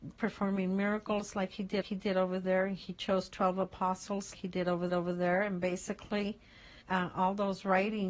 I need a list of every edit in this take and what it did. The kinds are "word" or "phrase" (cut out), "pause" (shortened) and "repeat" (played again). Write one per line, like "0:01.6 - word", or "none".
0:01.8 - repeat
0:04.3 - word
0:04.9 - repeat
0:06.8 - pause